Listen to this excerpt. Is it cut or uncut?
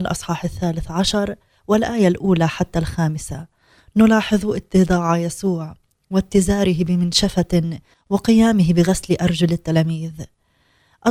uncut